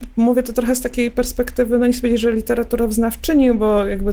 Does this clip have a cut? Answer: no; 0 cuts

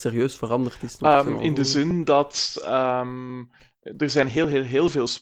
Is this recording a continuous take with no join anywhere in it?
yes; 0 cuts

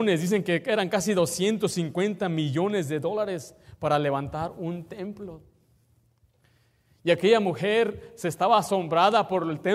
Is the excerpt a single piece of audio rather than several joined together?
yes; 0 cuts

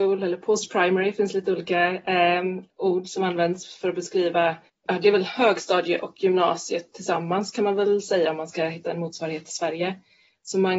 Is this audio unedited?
no; 1 cut; at 4.7 s

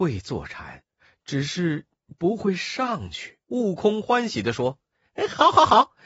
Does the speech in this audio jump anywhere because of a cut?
yes; 1 cut; at 3.4 s

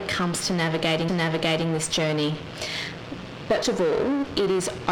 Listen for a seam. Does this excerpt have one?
yes; 2 cuts; at 1.1 s, 3.6 s

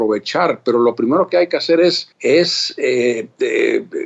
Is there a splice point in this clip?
yes; 1 cut; at 2.1 s

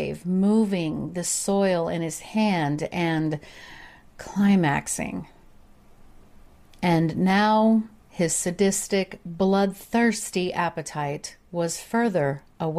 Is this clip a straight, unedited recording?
yes; 0 cuts

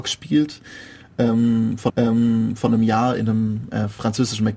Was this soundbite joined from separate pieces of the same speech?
yes; 1 cut; at 1.9 s

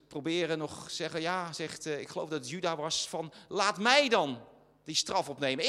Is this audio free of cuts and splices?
yes; 0 cuts

